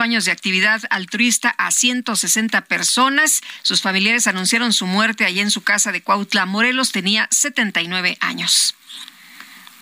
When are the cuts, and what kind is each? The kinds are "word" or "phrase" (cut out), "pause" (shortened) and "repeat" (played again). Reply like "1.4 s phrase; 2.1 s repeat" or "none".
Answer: none